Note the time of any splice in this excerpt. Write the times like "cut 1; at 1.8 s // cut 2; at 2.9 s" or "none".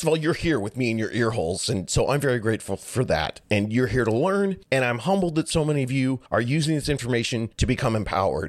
cut 1; at 4.6 s // cut 2; at 6.3 s // cut 3; at 7.5 s